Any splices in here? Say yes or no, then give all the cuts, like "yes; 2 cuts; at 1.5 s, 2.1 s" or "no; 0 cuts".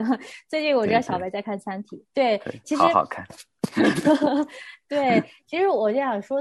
no; 0 cuts